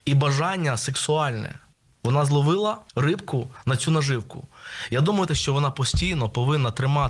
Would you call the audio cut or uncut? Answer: cut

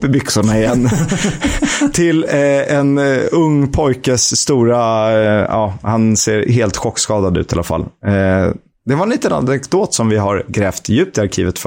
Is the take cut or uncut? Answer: uncut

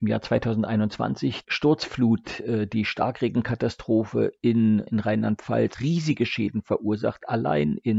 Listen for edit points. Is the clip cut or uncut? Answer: cut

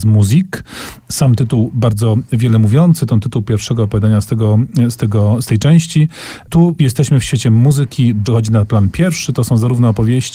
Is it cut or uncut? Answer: cut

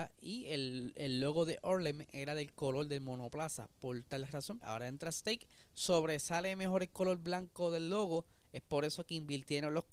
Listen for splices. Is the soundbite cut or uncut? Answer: cut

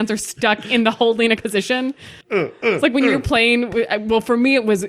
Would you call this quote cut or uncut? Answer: cut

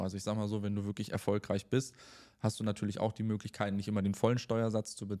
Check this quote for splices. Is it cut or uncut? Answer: uncut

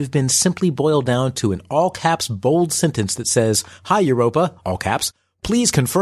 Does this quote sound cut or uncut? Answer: cut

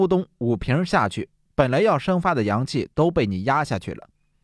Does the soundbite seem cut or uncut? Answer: uncut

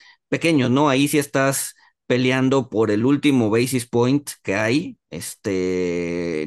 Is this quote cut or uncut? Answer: uncut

